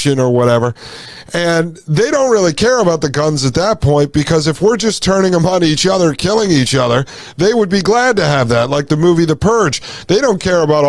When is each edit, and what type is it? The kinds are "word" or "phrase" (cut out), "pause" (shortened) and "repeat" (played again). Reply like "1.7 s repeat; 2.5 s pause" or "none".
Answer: none